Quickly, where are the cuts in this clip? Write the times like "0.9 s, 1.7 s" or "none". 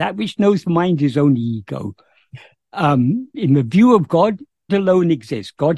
3.3 s, 4.7 s